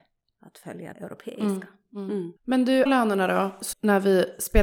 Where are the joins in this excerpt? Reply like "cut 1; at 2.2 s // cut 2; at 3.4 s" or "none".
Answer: cut 1; at 0.9 s // cut 2; at 2.4 s // cut 3; at 2.9 s // cut 4; at 3.7 s